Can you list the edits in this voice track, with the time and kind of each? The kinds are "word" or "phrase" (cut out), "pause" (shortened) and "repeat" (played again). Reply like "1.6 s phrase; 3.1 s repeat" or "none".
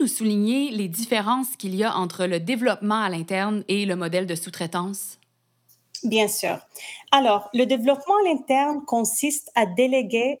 none